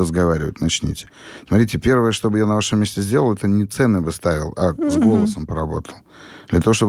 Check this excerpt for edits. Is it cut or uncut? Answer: uncut